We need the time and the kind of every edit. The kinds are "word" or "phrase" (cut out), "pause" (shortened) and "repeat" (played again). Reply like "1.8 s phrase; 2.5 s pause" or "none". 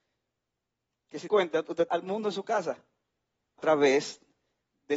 1.3 s word; 1.9 s word; 3.6 s word

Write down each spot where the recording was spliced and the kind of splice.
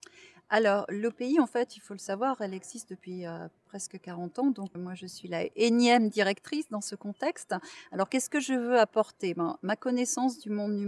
4.7 s word

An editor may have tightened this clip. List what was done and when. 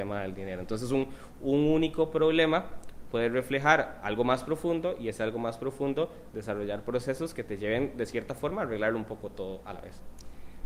none

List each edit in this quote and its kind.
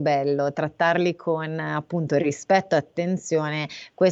none

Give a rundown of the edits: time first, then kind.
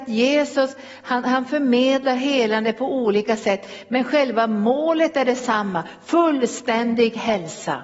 none

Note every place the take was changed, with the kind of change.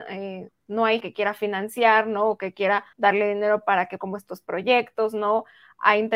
1.0 s word; 2.9 s pause; 4.0 s phrase

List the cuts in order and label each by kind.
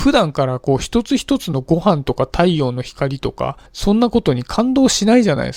3.7 s pause

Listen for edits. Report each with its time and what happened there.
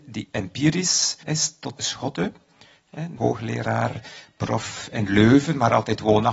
1.2 s phrase; 1.8 s word; 3.2 s phrase

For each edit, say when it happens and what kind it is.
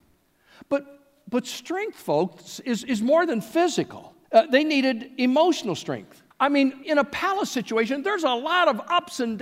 4.2 s pause; 6.3 s pause; 6.8 s word

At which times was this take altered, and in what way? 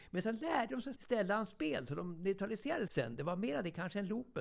1.0 s word; 2.9 s word

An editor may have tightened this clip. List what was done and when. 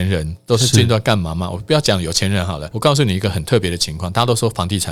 2.7 s word

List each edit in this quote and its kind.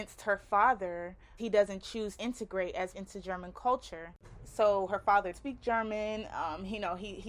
1.4 s word; 2.2 s word; 2.9 s word; 5.3 s word

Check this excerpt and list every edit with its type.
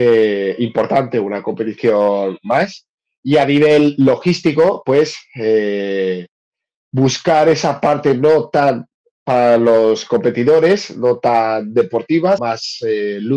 12.4 s word

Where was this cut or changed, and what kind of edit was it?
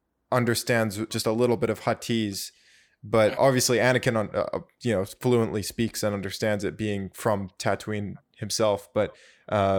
1.1 s word; 3.4 s word

